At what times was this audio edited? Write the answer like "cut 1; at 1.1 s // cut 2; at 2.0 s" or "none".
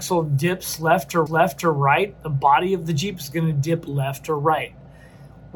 cut 1; at 1.3 s